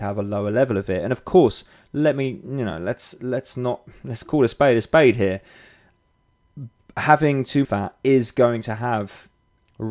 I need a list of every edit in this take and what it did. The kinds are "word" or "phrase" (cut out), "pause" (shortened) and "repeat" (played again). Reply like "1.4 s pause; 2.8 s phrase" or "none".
7.6 s phrase